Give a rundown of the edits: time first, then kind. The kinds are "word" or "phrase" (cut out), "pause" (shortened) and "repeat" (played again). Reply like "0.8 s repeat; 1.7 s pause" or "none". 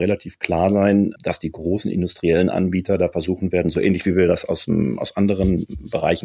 none

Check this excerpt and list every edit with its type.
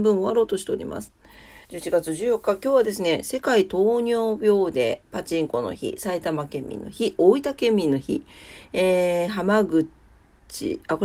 1.6 s pause

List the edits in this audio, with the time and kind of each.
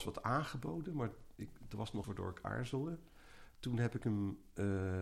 2.0 s word

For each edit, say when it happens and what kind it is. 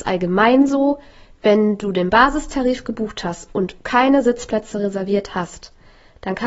none

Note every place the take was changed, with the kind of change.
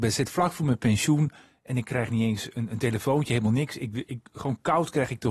4.1 s word

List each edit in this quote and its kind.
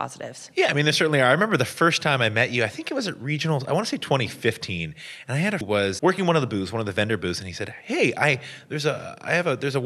5.6 s phrase; 6.0 s word

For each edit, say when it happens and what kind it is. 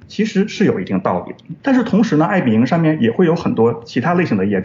1.6 s pause

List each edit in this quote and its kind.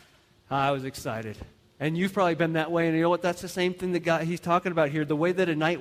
none

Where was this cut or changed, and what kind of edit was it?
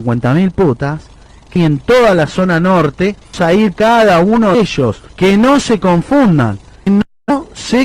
1.6 s word; 3.3 s word; 3.7 s word; 4.5 s word; 5.1 s pause; 6.9 s word

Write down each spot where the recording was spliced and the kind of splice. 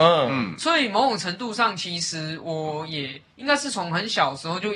3.3 s pause

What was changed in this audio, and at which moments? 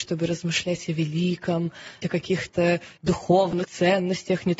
2.0 s word; 3.0 s word; 3.6 s word

